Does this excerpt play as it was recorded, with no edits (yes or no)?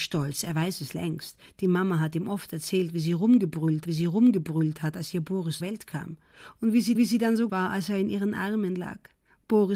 no